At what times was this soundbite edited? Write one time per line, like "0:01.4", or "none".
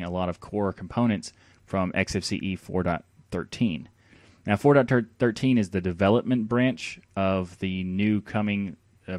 none

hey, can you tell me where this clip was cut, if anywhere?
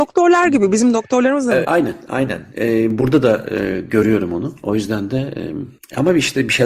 0:01.6

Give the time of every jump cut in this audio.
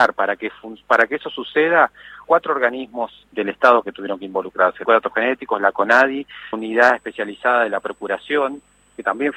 0:02.2
0:03.3
0:04.8
0:06.5

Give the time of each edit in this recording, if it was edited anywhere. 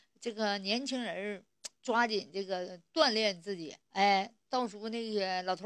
0:01.8
0:03.8

